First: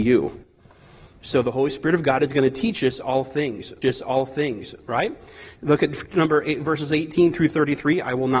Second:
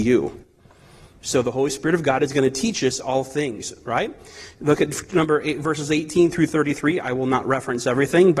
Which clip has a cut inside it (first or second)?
first